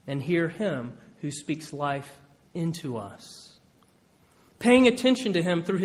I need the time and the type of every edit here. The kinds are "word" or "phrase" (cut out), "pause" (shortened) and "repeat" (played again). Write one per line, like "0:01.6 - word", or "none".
none